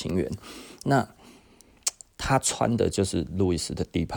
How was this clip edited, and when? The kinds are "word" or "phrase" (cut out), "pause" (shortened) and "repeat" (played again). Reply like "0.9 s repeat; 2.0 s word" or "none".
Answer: none